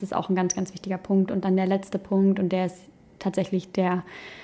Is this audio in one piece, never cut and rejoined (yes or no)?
yes